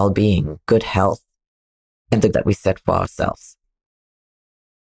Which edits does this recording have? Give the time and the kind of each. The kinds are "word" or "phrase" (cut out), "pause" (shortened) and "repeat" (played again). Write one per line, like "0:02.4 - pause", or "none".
0:02.3 - word